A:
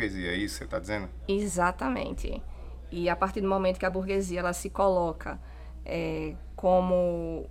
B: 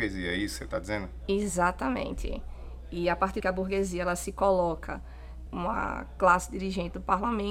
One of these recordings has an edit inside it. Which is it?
B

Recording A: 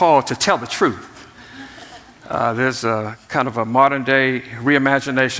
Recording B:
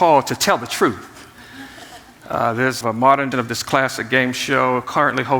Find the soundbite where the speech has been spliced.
B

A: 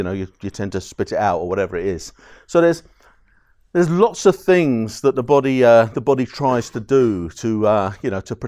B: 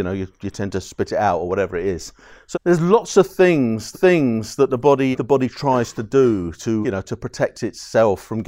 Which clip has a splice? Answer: B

